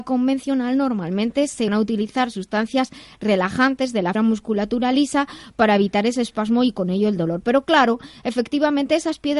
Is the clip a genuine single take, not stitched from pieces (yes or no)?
no